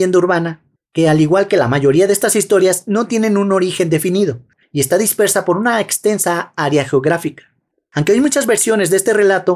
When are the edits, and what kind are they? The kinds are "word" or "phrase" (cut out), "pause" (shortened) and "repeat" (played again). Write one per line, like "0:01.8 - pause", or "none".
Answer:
none